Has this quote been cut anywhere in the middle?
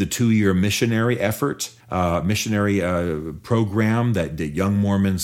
yes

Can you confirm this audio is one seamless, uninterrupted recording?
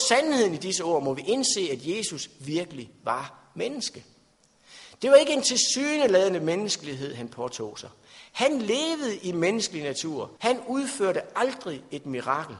no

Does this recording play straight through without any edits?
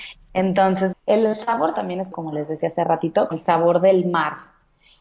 no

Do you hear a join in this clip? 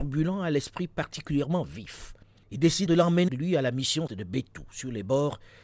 yes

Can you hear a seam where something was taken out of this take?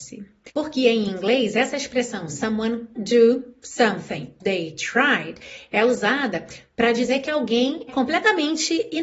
yes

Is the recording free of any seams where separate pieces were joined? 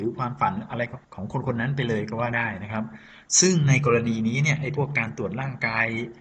no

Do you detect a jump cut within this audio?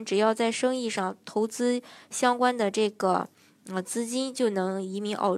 no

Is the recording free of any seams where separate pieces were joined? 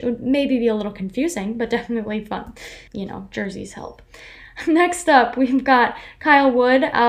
no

